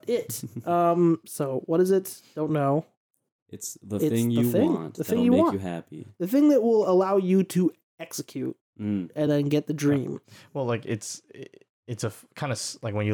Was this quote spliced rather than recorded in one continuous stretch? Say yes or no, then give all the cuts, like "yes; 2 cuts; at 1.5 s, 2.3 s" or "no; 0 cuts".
no; 0 cuts